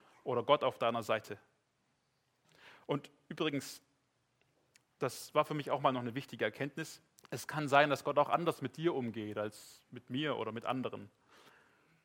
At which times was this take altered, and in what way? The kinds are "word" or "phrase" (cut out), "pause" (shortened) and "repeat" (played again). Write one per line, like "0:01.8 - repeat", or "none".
0:07.2 - pause